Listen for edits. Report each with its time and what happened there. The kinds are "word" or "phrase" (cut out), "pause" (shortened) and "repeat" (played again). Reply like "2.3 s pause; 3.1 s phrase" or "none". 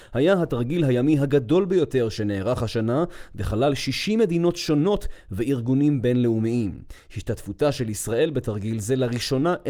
none